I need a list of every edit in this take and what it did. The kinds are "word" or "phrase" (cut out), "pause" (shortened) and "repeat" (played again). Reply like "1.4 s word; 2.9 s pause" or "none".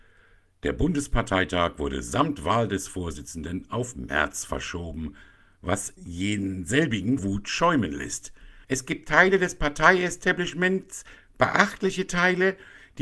6.0 s word; 7.2 s word; 8.6 s pause